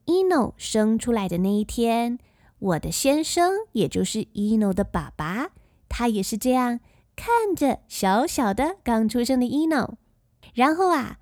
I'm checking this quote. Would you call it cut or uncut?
uncut